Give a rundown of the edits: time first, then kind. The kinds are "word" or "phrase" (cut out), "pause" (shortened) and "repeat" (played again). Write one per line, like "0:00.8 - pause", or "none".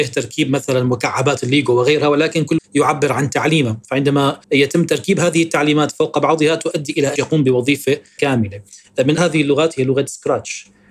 0:02.6 - word
0:04.4 - pause
0:07.2 - phrase
0:09.2 - word